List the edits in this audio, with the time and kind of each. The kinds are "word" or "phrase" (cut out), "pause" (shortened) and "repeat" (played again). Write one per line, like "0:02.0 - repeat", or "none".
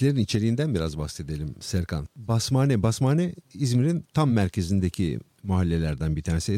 none